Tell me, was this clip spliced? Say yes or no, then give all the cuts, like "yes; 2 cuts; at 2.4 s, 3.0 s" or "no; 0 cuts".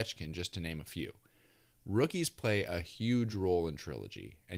no; 0 cuts